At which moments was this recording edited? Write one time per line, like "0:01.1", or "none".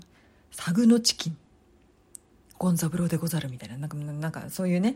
none

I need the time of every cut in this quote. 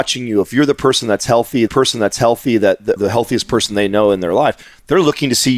0:01.7
0:03.0

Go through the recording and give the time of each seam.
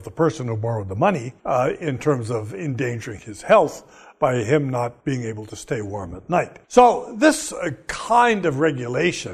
0:01.4
0:05.0
0:06.6

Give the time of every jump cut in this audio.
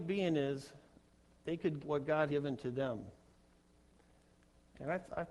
0:01.8
0:02.3

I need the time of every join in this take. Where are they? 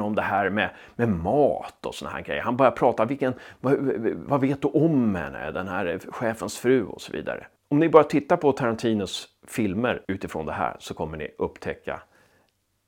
0:07.6
0:10.0

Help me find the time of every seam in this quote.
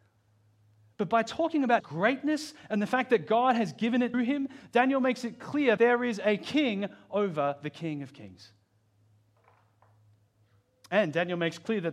0:01.8
0:04.1
0:05.8

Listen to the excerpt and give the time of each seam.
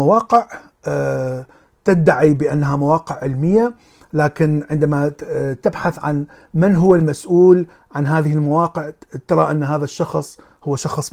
none

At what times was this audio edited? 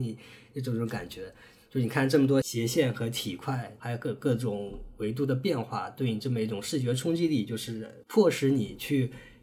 none

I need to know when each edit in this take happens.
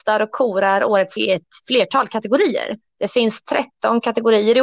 0:01.2
0:02.9

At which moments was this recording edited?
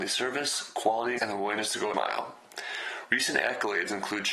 0:01.2
0:01.9

